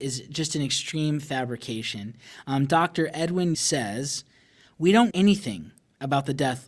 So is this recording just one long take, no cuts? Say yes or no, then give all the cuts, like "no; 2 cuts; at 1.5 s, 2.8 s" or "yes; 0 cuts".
no; 2 cuts; at 3.5 s, 5.1 s